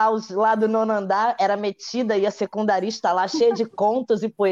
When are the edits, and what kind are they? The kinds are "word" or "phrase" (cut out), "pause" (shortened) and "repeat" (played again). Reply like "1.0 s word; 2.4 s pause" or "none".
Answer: none